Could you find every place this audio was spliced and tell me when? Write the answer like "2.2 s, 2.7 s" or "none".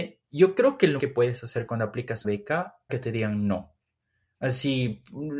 1.0 s, 2.2 s, 2.9 s